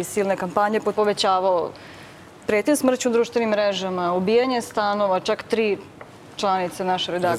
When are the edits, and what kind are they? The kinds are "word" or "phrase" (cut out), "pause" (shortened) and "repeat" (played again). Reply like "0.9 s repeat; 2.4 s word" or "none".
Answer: 0.9 s phrase